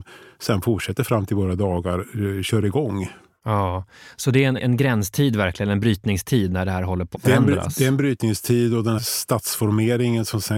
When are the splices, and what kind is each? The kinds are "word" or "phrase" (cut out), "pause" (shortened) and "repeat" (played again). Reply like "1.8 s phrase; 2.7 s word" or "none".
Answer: 4.6 s word; 7.1 s word; 9.0 s word